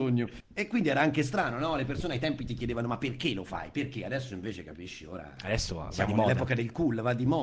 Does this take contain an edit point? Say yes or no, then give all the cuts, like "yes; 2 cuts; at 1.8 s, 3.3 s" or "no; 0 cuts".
no; 0 cuts